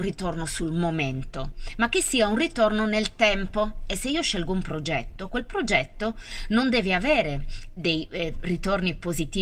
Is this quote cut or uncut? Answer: uncut